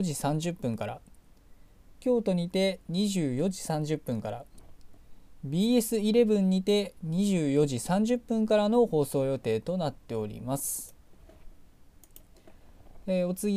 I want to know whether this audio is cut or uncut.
cut